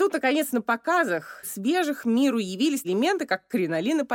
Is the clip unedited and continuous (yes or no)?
no